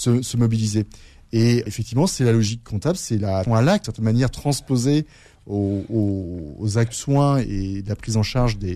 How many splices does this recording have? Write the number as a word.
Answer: four